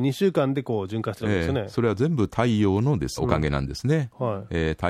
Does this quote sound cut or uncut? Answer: cut